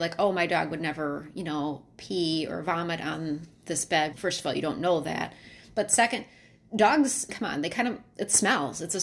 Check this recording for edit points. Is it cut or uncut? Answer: cut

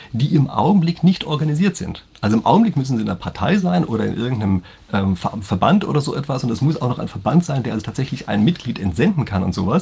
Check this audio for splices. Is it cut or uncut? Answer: uncut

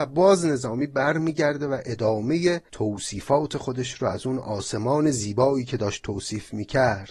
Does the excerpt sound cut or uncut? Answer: cut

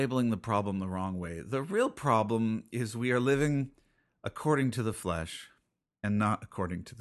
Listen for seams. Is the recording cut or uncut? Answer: uncut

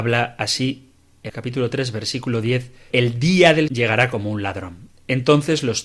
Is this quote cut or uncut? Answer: cut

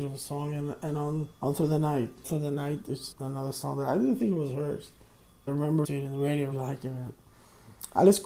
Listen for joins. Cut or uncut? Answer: cut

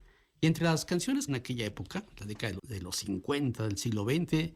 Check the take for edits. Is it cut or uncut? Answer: cut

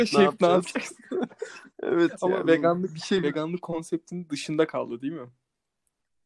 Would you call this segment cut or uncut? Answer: uncut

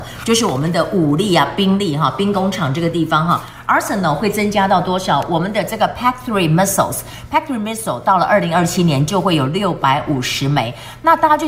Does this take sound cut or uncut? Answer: uncut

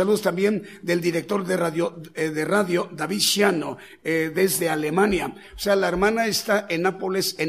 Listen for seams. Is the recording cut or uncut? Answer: uncut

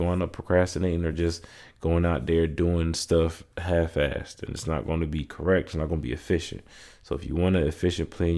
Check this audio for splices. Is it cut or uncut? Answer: uncut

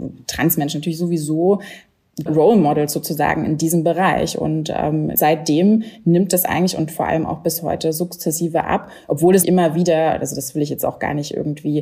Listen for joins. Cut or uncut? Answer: cut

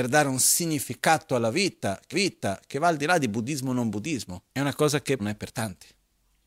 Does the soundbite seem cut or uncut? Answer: cut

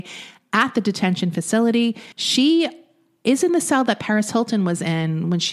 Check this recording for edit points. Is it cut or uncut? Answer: cut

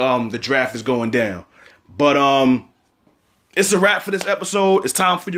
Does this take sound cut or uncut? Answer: uncut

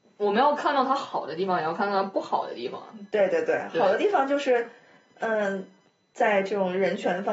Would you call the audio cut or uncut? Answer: uncut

